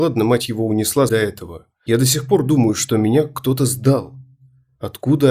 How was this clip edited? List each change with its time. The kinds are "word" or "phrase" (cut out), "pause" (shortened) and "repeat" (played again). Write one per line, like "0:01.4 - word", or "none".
0:01.1 - phrase